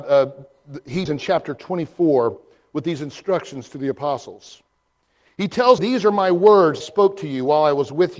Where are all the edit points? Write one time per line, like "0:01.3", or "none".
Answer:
0:01.1
0:05.8
0:06.8